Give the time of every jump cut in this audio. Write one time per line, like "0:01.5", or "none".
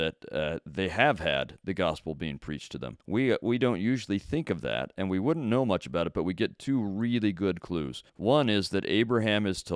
0:03.0
0:08.1